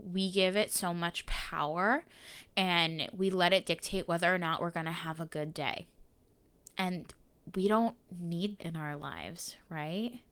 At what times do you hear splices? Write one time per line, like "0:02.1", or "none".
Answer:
0:08.6